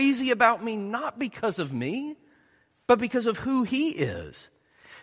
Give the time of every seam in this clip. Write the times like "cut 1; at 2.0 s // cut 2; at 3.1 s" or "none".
none